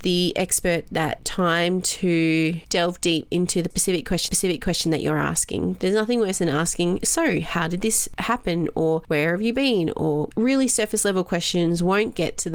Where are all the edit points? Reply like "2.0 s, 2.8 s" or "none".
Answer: 4.3 s